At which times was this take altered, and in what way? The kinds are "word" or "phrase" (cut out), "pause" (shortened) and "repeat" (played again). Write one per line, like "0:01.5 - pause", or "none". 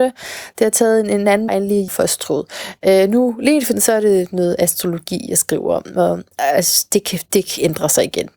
0:01.5 - word
0:01.9 - word
0:03.7 - word
0:06.3 - pause